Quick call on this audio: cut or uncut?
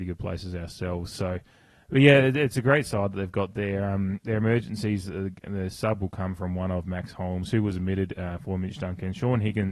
uncut